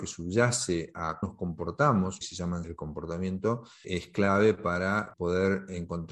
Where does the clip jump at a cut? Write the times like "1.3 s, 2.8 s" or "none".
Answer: 1.2 s, 2.2 s, 2.6 s, 3.8 s, 5.1 s